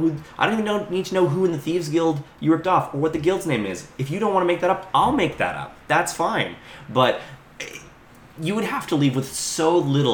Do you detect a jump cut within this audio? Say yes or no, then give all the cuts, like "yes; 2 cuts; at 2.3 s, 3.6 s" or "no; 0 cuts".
no; 0 cuts